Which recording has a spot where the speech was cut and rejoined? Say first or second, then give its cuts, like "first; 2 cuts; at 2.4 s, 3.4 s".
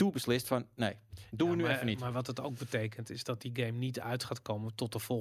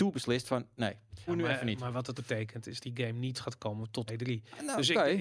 second; 5 cuts; at 1.3 s, 2.2 s, 2.8 s, 3.3 s, 4.1 s